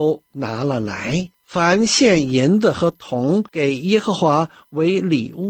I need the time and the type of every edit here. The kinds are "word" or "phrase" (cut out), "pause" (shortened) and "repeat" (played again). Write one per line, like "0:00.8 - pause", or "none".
0:01.3 - pause
0:03.5 - pause